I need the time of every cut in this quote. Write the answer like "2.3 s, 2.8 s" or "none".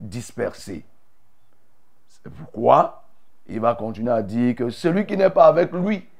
none